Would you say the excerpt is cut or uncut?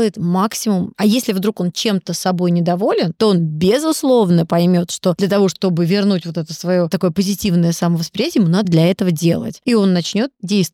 cut